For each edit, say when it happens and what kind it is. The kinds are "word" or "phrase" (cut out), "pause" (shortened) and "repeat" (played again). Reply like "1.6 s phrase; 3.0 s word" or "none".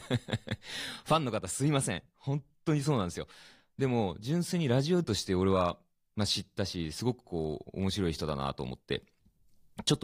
5.0 s word

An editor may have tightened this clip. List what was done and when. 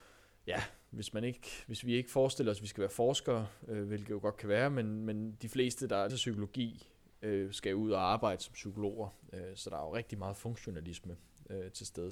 6.1 s word

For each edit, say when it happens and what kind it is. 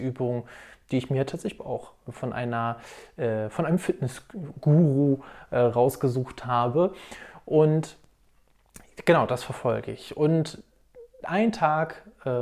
1.6 s phrase

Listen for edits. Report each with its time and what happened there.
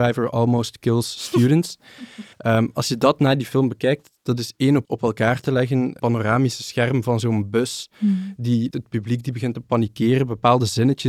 2.3 s pause; 4.8 s word; 6.0 s word; 8.7 s phrase

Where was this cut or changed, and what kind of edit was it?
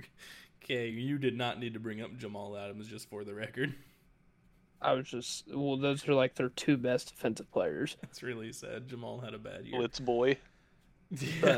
none

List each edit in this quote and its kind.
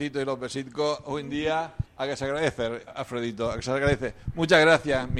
1.9 s pause; 2.9 s word

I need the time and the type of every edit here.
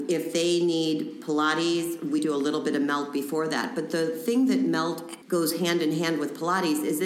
2.2 s word; 5.2 s word

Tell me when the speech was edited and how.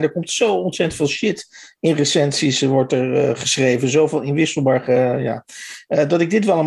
none

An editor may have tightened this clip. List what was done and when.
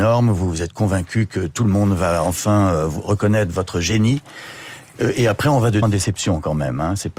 5.8 s word

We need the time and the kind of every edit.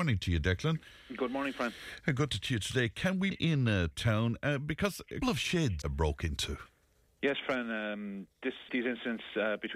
2.4 s word; 3.3 s word; 3.9 s word; 5.2 s word; 5.8 s word; 8.7 s word

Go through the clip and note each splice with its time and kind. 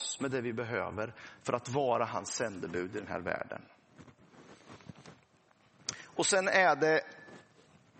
none

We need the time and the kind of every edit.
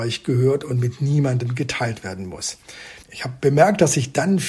3.0 s pause

